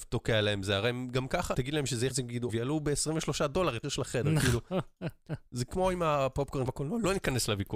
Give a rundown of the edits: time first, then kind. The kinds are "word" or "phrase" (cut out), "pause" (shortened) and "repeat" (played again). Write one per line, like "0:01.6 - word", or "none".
0:01.5 - word
0:02.1 - word
0:02.5 - word
0:03.8 - word
0:06.7 - word